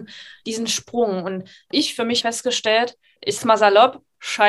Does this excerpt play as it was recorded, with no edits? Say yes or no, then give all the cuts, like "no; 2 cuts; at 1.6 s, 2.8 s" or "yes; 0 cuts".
no; 3 cuts; at 1.7 s, 2.2 s, 3.4 s